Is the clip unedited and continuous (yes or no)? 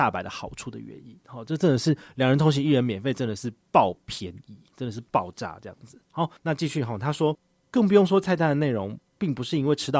no